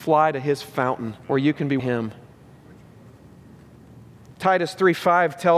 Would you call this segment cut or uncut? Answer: cut